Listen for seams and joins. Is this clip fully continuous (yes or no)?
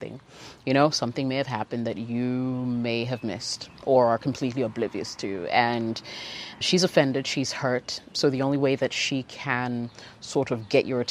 no